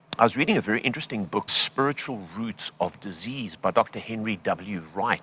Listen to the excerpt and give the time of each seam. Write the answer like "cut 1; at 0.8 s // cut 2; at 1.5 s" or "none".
cut 1; at 1.5 s